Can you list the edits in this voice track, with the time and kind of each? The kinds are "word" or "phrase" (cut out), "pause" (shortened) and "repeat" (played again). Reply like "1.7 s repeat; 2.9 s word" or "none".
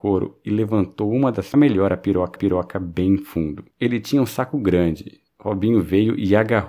1.5 s phrase; 2.4 s repeat; 3.7 s pause; 5.3 s pause